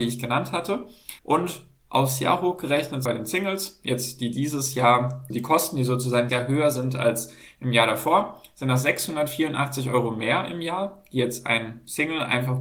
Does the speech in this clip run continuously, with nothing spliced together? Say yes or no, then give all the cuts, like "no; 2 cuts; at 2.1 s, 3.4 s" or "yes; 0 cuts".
no; 4 cuts; at 1.2 s, 3.0 s, 5.3 s, 6.3 s